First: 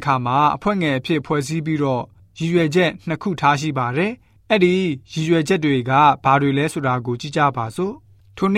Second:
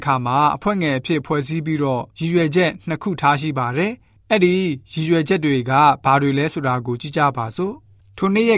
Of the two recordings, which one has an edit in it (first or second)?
second